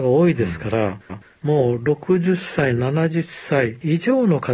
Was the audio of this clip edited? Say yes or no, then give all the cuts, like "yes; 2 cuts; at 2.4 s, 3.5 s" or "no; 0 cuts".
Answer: yes; 1 cut; at 1.1 s